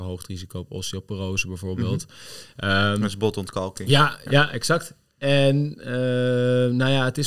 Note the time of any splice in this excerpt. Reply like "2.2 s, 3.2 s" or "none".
none